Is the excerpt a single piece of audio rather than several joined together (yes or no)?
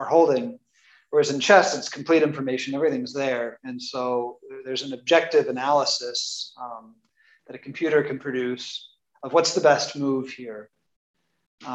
yes